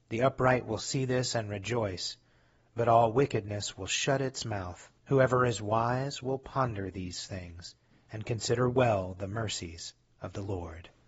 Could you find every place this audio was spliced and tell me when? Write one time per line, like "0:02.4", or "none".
0:05.0